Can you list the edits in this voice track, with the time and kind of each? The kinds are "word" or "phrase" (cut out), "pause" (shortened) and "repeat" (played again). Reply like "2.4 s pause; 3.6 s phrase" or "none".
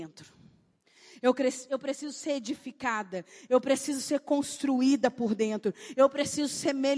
none